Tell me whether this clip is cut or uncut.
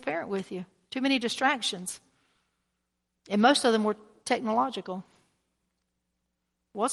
uncut